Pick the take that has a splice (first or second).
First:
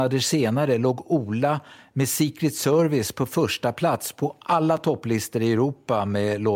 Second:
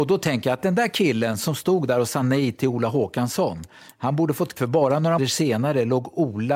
second